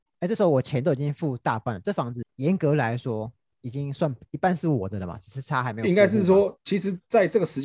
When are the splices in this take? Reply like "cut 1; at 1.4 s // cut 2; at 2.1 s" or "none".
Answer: none